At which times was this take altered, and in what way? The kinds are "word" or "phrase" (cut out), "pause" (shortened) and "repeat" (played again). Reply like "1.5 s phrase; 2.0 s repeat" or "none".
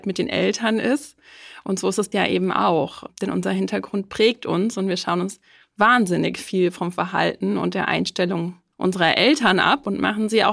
2.1 s phrase